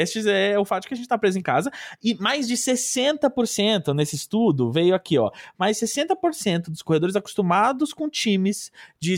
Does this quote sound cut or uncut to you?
uncut